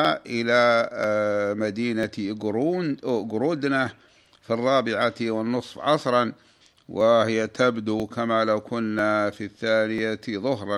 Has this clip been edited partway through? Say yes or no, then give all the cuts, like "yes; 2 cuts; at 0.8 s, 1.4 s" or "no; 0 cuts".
no; 0 cuts